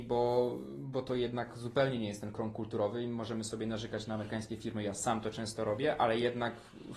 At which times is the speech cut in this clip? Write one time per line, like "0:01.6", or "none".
none